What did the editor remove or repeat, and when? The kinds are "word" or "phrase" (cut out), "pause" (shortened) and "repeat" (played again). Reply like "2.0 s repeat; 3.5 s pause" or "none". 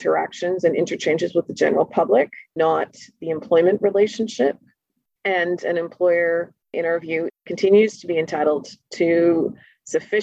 2.6 s word